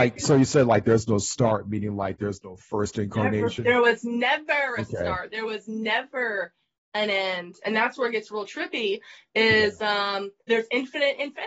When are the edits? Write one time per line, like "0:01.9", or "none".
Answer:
none